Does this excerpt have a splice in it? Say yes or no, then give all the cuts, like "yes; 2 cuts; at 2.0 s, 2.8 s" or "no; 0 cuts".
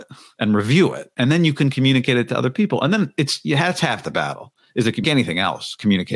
yes; 1 cut; at 5.0 s